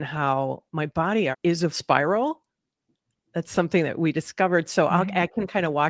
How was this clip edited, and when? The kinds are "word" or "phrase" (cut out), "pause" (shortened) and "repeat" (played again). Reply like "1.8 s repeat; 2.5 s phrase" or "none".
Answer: 1.3 s word; 1.7 s word